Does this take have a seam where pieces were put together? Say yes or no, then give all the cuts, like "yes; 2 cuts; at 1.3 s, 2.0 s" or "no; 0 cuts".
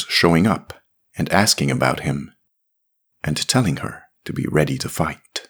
no; 0 cuts